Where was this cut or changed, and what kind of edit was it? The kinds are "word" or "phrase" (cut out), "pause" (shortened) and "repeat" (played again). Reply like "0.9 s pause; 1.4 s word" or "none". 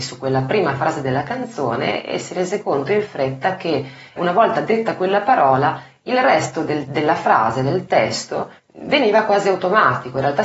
4.2 s word; 8.6 s pause